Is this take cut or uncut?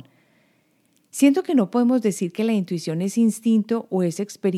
uncut